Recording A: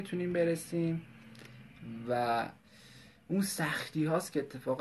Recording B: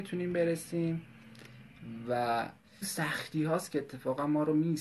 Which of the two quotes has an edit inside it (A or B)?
B